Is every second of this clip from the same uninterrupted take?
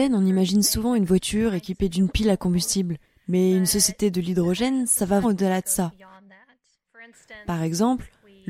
no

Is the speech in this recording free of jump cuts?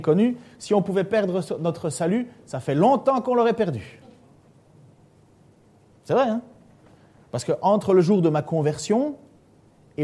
yes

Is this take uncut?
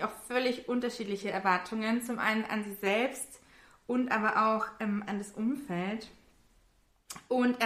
yes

